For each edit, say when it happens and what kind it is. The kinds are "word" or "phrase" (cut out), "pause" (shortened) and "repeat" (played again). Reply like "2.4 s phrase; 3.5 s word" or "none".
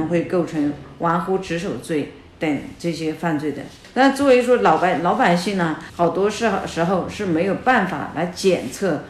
none